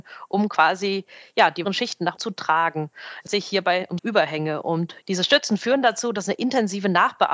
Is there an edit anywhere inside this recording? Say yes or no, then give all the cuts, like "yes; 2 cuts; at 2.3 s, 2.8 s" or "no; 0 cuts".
yes; 5 cuts; at 1.6 s, 2.2 s, 3.3 s, 4.0 s, 5.0 s